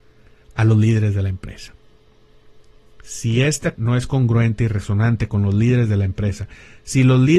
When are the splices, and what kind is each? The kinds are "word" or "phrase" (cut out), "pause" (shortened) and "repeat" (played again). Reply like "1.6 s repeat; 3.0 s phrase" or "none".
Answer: 3.8 s word